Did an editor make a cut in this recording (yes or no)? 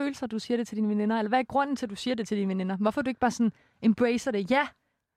no